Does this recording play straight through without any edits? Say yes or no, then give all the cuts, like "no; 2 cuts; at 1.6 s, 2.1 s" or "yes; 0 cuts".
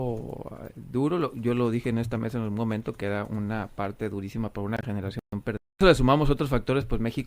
no; 1 cut; at 5.7 s